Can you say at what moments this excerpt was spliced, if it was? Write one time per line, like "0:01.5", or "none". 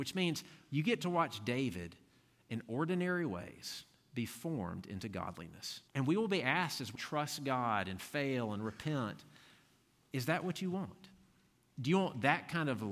0:05.9
0:07.0